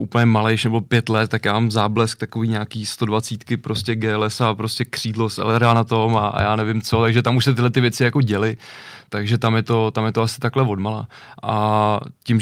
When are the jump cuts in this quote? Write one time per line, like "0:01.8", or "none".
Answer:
none